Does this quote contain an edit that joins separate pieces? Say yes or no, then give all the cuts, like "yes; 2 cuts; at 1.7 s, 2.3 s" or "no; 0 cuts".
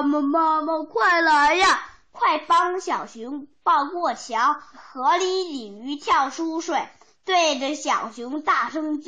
no; 0 cuts